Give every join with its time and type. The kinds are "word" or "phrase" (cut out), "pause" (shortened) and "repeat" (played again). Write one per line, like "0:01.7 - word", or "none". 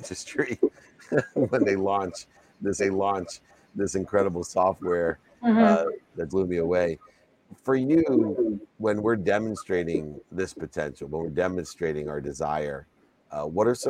0:02.8 - repeat
0:06.3 - word
0:08.7 - pause
0:10.2 - word